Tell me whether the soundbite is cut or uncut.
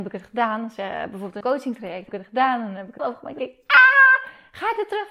cut